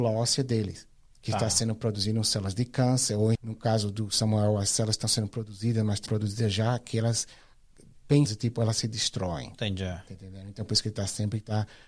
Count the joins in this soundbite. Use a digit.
3